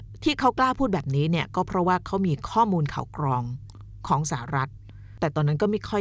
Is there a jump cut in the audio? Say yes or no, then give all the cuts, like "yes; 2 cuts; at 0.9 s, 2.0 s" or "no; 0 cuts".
no; 0 cuts